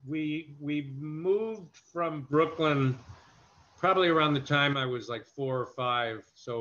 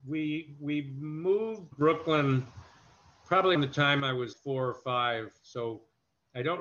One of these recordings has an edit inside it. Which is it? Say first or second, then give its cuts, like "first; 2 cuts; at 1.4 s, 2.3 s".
second; 3 cuts; at 1.7 s, 3.5 s, 4.3 s